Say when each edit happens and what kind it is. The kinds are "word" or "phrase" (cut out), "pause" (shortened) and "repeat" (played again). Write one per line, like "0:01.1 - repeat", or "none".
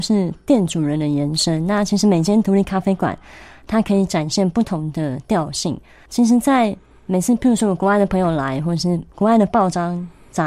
0:09.1 - pause